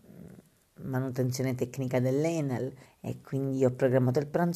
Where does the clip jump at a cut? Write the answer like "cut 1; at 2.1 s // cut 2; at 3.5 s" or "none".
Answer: cut 1; at 2.9 s

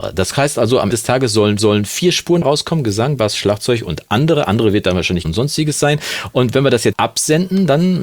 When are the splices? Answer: cut 1; at 0.9 s // cut 2; at 1.6 s // cut 3; at 2.4 s // cut 4; at 5.2 s // cut 5; at 6.9 s

